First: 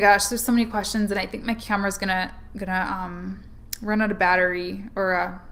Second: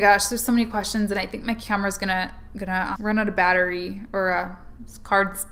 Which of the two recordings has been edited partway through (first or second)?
second